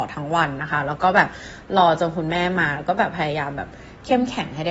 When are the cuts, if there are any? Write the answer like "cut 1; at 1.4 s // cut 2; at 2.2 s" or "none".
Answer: none